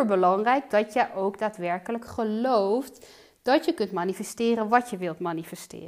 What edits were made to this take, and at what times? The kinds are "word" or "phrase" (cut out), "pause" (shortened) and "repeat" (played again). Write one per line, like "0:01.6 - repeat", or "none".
none